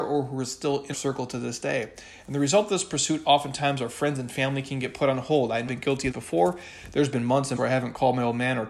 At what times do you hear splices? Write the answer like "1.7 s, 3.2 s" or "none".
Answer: 0.9 s, 5.7 s, 6.1 s, 7.6 s